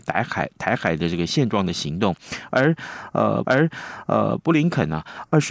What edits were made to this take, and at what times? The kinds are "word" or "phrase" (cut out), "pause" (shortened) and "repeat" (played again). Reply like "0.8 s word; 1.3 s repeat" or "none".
3.4 s repeat